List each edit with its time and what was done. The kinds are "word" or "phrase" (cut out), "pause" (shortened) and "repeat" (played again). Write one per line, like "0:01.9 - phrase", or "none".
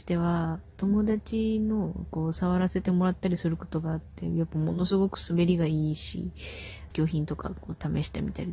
0:06.9 - word